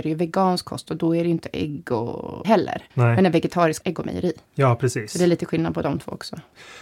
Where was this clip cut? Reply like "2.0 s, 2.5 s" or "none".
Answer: 2.4 s, 2.9 s, 3.8 s, 4.5 s